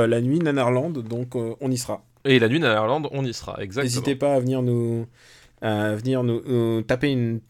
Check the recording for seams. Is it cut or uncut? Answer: cut